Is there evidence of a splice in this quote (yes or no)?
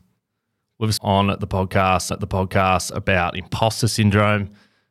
yes